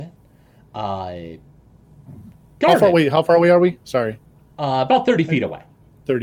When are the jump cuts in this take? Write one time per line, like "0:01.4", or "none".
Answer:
none